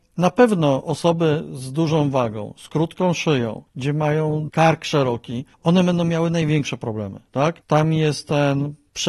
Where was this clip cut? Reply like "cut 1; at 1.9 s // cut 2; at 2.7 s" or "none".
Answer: cut 1; at 4.5 s // cut 2; at 5.5 s